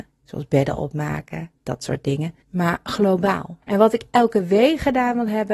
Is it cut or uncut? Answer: cut